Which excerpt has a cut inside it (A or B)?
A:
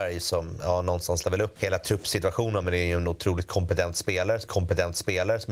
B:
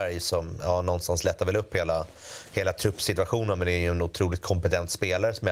A